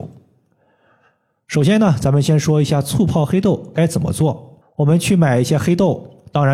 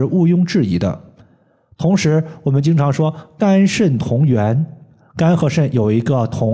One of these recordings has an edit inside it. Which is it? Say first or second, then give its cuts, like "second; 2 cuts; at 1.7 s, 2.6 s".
first; 1 cut; at 4.6 s